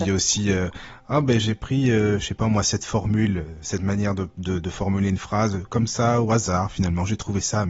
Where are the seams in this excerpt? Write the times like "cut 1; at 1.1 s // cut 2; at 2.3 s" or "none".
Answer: none